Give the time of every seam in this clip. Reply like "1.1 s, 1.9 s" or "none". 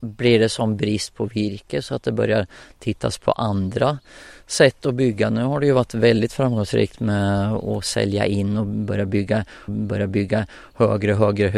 9.7 s